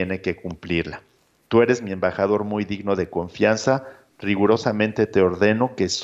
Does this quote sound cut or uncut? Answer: uncut